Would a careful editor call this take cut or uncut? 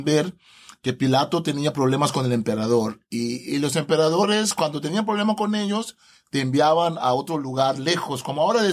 uncut